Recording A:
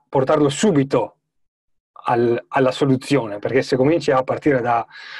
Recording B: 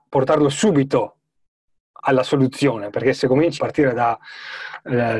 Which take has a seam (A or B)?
B